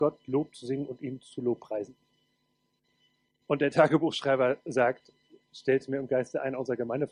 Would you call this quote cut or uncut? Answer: uncut